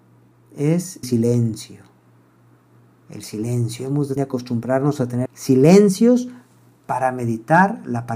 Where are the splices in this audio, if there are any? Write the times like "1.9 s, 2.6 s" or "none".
1.0 s, 4.2 s, 5.3 s